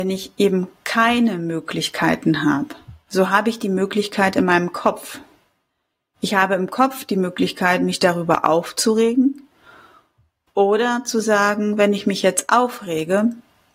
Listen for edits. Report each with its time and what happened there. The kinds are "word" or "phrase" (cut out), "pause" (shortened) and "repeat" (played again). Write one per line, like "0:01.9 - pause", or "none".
none